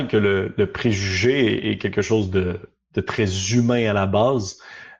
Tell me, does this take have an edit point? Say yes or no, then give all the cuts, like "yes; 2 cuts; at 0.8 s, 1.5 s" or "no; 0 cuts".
no; 0 cuts